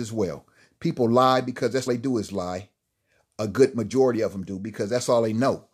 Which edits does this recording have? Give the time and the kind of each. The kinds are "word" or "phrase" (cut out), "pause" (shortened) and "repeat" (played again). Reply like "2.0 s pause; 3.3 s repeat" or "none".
1.9 s word

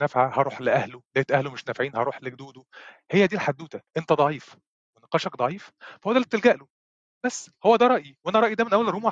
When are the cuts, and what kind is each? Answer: 3.9 s pause

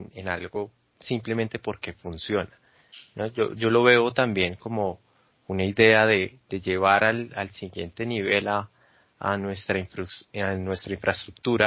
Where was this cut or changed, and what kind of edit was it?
none

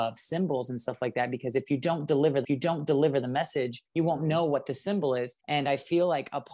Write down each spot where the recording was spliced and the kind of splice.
2.4 s repeat; 3.9 s pause; 5.4 s pause

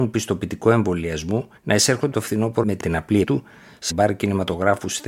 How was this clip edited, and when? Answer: 1.6 s pause; 2.1 s word; 2.6 s word; 3.2 s word; 3.9 s word

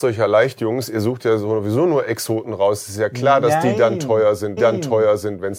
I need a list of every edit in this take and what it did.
4.6 s repeat

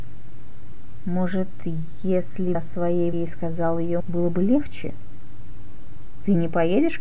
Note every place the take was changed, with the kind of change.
2.5 s word; 3.1 s word; 4.0 s word

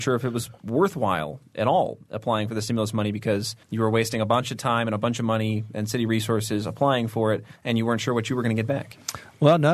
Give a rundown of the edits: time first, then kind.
3.6 s pause; 7.6 s pause

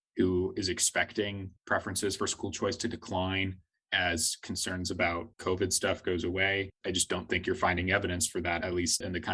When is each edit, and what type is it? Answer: 6.8 s pause

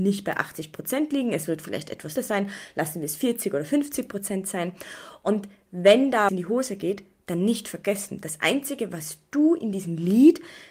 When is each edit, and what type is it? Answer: 2.2 s word; 6.3 s phrase

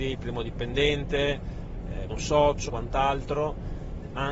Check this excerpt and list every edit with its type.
2.1 s word; 2.7 s word

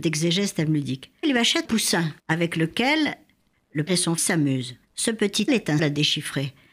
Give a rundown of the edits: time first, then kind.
1.2 s word; 1.7 s word; 2.2 s pause; 3.9 s word; 4.2 s word; 4.8 s pause; 5.5 s word; 5.8 s word

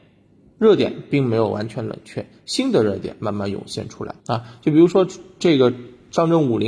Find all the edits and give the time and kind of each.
4.2 s pause

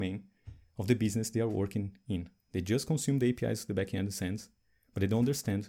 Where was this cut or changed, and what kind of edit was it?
none

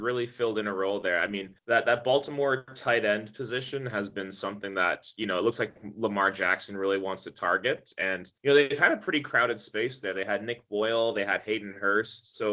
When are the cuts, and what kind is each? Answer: 1.6 s pause; 8.4 s pause

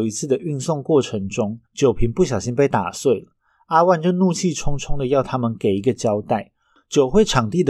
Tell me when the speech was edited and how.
1.7 s pause

